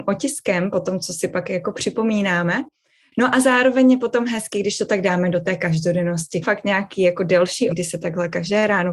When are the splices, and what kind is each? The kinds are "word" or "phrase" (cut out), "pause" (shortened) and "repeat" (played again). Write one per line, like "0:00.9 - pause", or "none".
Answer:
0:06.4 - word
0:07.7 - word